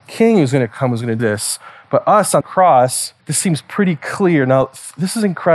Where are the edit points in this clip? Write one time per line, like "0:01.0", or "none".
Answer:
0:01.2
0:02.4
0:03.2